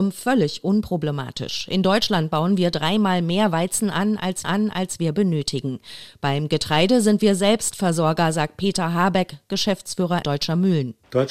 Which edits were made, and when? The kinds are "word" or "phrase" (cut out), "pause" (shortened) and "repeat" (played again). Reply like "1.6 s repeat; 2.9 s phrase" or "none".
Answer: 4.4 s repeat; 10.2 s phrase